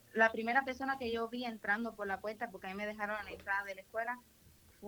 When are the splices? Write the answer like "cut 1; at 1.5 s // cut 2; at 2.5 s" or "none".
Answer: none